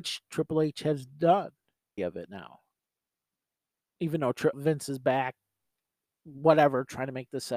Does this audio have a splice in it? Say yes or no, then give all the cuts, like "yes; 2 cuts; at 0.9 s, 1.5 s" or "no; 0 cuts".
yes; 2 cuts; at 2.0 s, 4.5 s